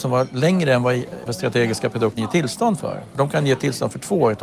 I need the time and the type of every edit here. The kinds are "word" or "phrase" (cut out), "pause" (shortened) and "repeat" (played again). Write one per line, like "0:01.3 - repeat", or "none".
0:01.3 - word
0:02.2 - word